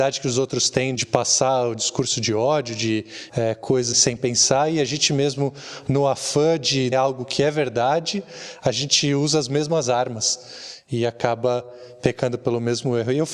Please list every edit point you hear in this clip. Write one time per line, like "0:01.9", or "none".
0:01.0
0:03.3
0:03.9
0:06.9